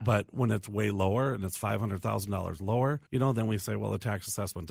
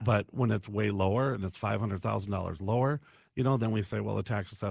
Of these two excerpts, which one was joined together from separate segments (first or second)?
first